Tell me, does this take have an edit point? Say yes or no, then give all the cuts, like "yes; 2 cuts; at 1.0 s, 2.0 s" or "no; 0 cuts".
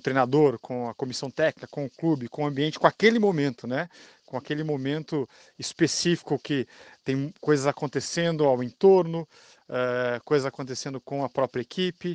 no; 0 cuts